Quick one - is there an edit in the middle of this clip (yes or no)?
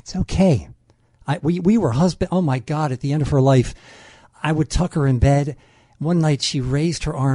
no